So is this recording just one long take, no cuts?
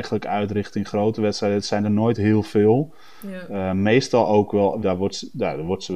no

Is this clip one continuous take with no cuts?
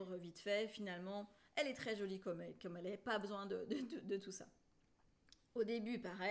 yes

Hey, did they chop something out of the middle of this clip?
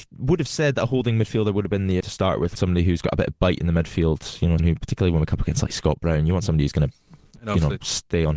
yes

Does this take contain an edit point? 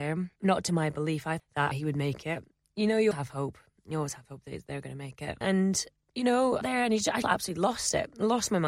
yes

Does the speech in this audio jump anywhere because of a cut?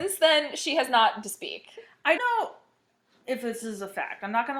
yes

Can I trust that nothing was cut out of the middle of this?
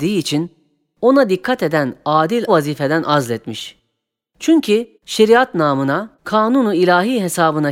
no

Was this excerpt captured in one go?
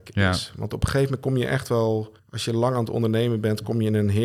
no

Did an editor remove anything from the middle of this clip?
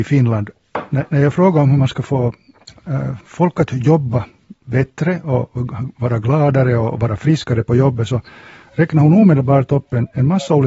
no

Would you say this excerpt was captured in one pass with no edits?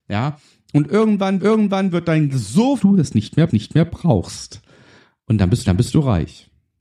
no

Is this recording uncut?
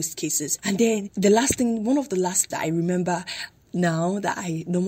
no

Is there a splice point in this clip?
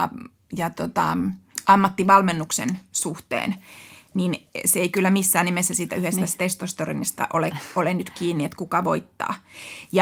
no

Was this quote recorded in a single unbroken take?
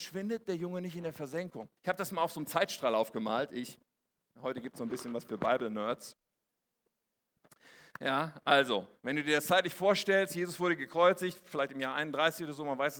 no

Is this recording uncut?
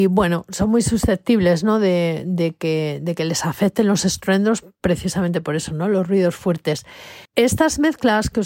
no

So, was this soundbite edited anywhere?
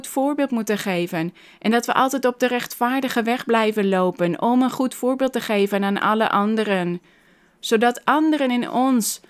no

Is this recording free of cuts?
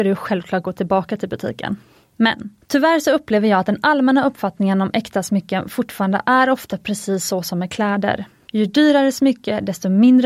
yes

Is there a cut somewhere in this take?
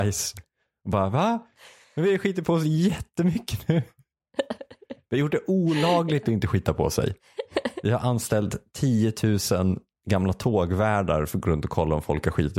no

